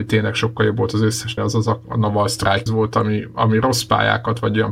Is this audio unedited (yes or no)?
no